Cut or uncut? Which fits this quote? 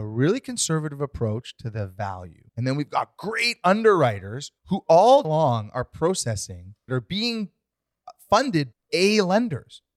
cut